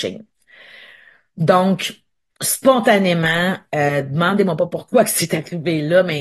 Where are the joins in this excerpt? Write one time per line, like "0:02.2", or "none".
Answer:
none